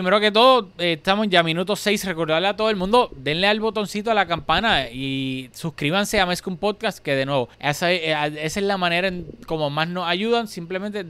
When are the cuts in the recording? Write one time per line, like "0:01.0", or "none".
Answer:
0:07.5